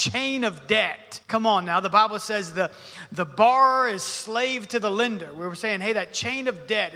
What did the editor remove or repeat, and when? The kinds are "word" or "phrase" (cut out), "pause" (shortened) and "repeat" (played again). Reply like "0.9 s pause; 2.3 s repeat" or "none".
1.2 s pause